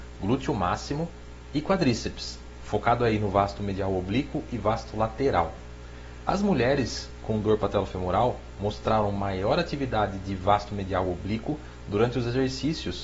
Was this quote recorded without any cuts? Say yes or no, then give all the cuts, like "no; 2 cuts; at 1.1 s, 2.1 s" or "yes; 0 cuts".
yes; 0 cuts